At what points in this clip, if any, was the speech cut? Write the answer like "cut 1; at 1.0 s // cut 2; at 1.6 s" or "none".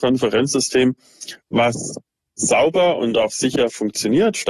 none

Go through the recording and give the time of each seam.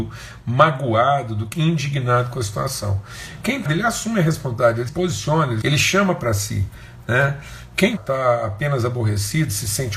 cut 1; at 1.5 s // cut 2; at 3.7 s // cut 3; at 4.9 s // cut 4; at 5.6 s // cut 5; at 8.0 s

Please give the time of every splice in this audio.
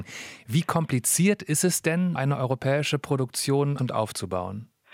cut 1; at 2.2 s // cut 2; at 3.8 s

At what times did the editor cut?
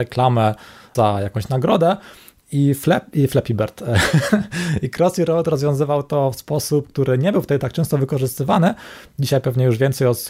none

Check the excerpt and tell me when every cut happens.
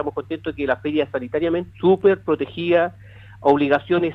cut 1; at 1.7 s

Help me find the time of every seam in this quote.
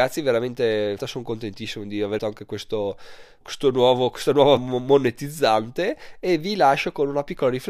cut 1; at 1.0 s // cut 2; at 2.2 s // cut 3; at 3.4 s // cut 4; at 4.6 s

